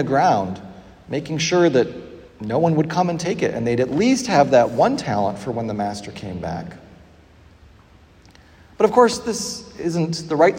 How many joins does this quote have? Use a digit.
1